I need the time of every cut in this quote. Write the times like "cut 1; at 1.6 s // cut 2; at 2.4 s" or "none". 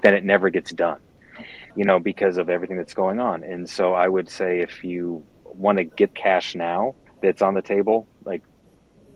cut 1; at 1.7 s // cut 2; at 6.1 s // cut 3; at 7.1 s